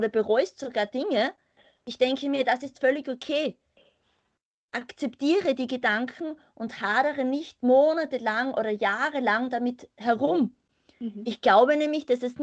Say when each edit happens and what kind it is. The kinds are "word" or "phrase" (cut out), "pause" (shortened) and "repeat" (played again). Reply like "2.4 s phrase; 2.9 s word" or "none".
none